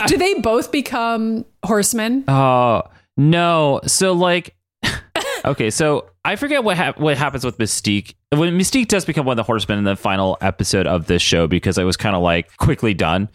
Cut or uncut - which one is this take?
uncut